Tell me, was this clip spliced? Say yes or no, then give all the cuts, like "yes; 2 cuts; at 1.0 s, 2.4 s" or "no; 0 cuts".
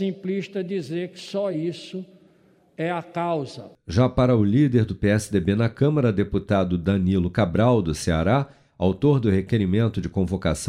no; 0 cuts